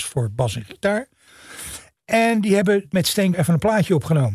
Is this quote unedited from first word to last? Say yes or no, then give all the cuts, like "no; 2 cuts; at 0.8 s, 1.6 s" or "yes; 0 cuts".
no; 2 cuts; at 2.9 s, 3.3 s